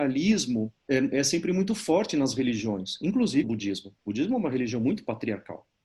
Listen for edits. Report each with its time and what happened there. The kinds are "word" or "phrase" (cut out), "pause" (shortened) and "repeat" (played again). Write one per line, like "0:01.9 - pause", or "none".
0:03.4 - word